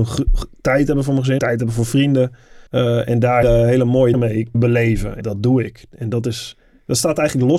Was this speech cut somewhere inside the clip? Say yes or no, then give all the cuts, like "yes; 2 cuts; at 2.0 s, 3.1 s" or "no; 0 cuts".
yes; 6 cuts; at 1.4 s, 2.7 s, 3.4 s, 4.1 s, 4.5 s, 5.2 s